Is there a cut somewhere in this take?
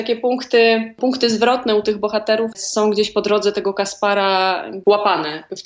yes; 1 cut; at 2.5 s

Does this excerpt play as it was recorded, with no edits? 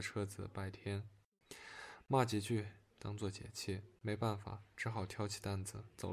no; 1 cut; at 4.0 s

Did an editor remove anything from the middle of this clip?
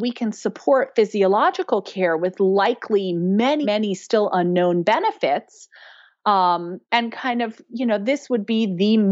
yes; 2 cuts; at 3.6 s, 6.8 s

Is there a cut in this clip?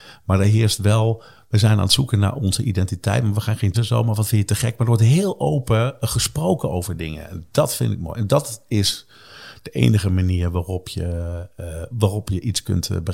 yes; 2 cuts; at 3.7 s, 11.9 s

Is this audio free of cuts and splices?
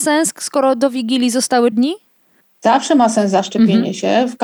no; 1 cut; at 1.7 s

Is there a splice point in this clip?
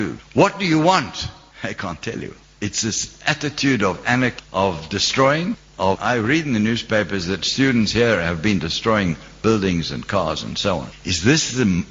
no; 0 cuts

